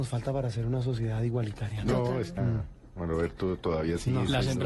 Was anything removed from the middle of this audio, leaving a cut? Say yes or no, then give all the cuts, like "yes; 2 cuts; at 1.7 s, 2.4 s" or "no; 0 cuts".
yes; 1 cut; at 2.4 s